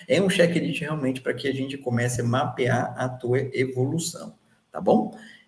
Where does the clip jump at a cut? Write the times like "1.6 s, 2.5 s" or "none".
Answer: none